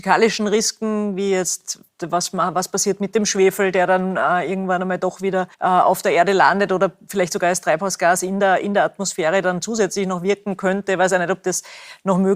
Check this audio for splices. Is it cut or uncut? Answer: cut